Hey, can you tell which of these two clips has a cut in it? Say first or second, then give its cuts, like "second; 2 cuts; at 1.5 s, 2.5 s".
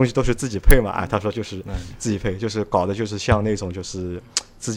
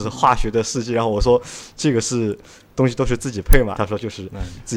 second; 1 cut; at 3.7 s